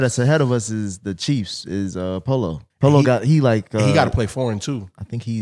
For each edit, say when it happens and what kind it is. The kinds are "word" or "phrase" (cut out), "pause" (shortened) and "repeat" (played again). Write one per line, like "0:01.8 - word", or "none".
0:02.7 - pause

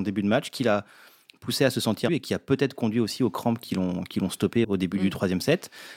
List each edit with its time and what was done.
0:02.1 - phrase
0:04.6 - word

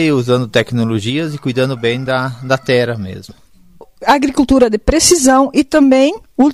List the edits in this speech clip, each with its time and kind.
none

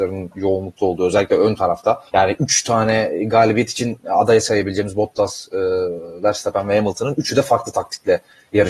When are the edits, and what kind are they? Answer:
0:02.1 - pause

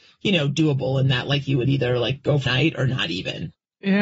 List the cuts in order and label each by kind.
0:02.5 - word

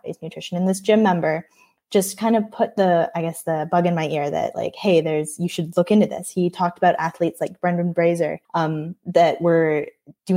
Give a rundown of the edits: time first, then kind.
0:08.4 - pause

